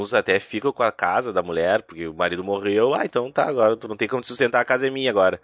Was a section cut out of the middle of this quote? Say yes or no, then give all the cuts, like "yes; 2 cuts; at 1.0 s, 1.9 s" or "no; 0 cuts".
no; 0 cuts